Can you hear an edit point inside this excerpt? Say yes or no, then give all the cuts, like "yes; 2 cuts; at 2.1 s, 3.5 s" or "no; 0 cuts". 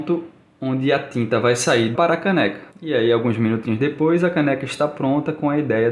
yes; 2 cuts; at 1.9 s, 2.7 s